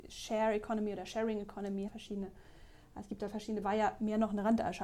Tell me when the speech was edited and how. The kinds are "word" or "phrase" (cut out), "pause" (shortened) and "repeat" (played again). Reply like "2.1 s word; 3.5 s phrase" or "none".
1.9 s phrase; 3.6 s word